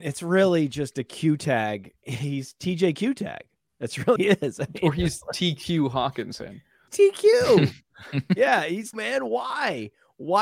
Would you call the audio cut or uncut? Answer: cut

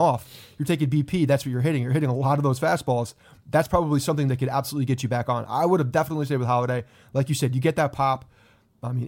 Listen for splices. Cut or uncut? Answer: uncut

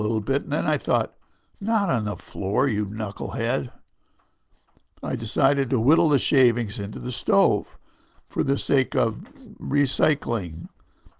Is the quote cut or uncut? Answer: uncut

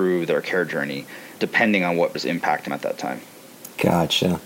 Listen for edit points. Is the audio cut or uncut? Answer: cut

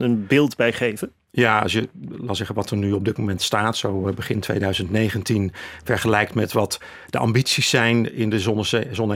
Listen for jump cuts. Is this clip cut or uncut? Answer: uncut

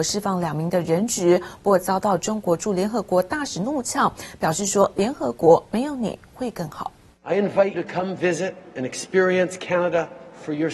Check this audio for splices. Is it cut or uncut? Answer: cut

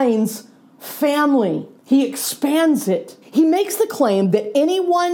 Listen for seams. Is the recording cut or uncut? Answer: cut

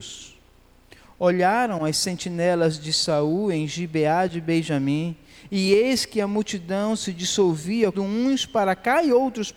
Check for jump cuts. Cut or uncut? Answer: cut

